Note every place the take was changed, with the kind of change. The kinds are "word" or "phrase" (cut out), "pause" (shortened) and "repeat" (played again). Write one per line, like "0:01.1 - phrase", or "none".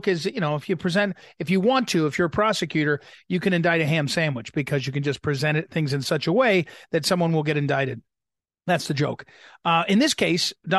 none